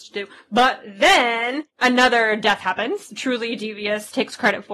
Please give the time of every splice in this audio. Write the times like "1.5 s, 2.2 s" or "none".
1.7 s